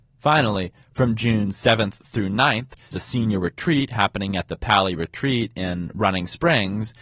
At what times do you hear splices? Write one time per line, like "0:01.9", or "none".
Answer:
0:02.9